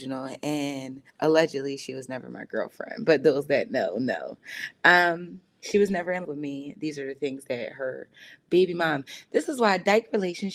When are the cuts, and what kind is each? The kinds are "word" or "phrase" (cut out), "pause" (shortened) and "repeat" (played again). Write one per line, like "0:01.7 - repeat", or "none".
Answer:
0:01.1 - pause
0:06.2 - word